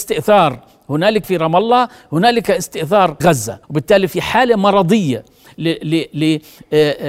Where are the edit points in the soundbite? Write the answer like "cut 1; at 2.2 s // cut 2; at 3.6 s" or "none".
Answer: cut 1; at 1.2 s // cut 2; at 3.2 s // cut 3; at 3.6 s